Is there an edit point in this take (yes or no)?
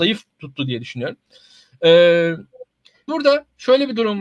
yes